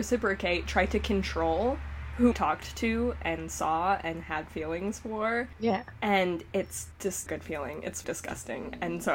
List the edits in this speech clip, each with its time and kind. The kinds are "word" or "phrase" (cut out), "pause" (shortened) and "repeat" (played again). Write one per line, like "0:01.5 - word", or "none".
0:02.3 - word
0:07.3 - phrase
0:08.0 - word